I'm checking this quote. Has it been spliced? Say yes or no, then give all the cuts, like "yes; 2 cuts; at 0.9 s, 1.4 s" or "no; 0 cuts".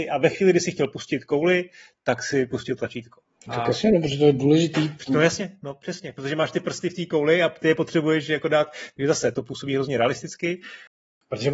yes; 1 cut; at 9.3 s